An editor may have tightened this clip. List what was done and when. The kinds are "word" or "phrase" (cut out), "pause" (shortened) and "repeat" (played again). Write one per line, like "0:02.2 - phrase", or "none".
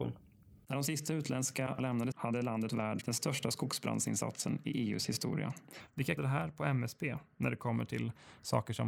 0:01.8 - word
0:02.1 - phrase
0:02.7 - word
0:03.0 - word
0:06.2 - phrase